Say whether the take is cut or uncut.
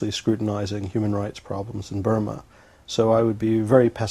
uncut